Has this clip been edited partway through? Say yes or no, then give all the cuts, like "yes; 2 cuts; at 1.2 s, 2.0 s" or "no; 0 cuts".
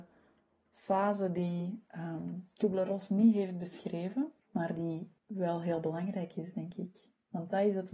yes; 2 cuts; at 4.4 s, 5.2 s